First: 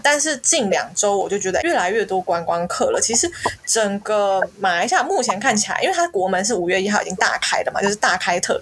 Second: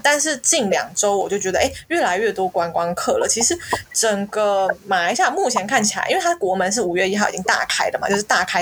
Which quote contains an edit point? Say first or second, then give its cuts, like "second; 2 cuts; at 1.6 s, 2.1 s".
first; 1 cut; at 1.6 s